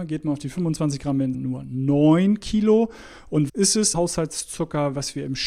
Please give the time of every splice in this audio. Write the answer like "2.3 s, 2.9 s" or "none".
1.3 s, 3.5 s, 3.9 s